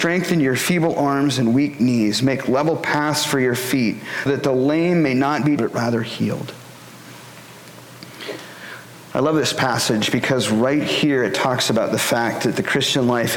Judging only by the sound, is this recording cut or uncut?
cut